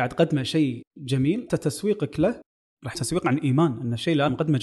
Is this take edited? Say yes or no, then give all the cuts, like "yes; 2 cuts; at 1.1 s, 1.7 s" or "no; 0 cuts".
yes; 2 cuts; at 1.5 s, 2.9 s